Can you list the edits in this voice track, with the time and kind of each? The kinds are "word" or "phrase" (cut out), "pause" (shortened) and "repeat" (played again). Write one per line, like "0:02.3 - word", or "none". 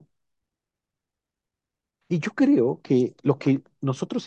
none